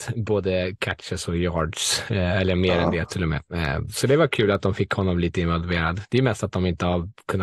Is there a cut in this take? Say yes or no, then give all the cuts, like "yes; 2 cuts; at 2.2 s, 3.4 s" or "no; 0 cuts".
no; 0 cuts